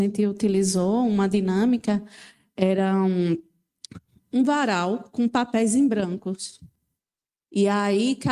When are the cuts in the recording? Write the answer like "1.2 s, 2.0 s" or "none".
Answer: none